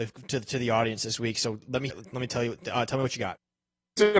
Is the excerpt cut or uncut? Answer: cut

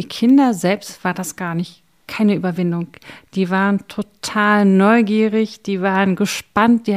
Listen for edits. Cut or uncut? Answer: uncut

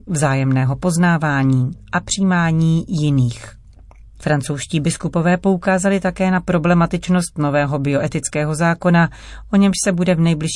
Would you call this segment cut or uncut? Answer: uncut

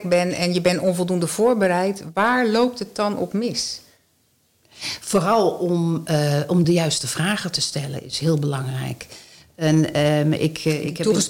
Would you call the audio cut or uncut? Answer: uncut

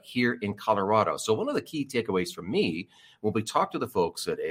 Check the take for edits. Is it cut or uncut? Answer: uncut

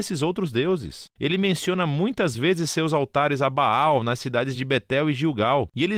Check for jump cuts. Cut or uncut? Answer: uncut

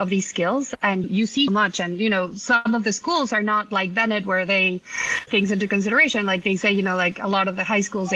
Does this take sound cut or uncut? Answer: cut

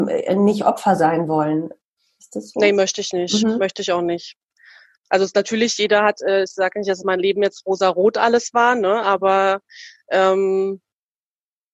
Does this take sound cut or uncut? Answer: uncut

